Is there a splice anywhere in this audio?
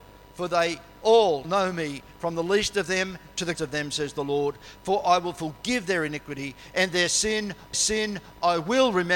yes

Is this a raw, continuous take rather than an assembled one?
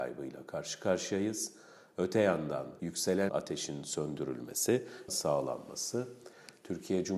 no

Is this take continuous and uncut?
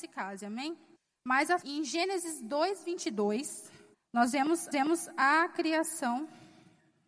no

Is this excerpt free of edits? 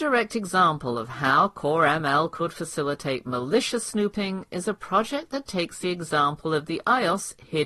yes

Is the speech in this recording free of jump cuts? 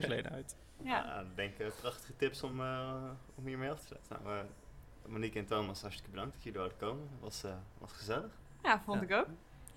yes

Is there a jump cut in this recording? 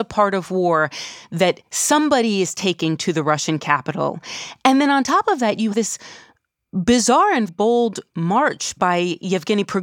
yes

